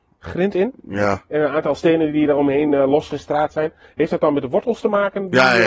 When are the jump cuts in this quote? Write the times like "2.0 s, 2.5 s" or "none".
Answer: none